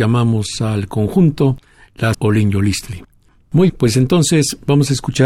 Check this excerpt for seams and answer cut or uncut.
cut